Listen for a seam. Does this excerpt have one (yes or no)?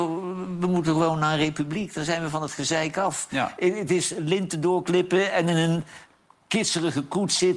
no